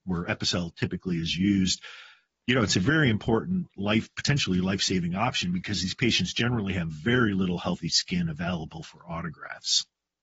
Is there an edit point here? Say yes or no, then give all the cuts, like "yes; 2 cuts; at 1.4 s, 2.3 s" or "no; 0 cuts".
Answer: no; 0 cuts